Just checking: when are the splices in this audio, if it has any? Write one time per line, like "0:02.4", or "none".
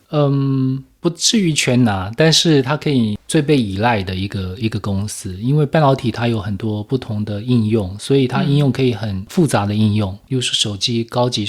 0:01.0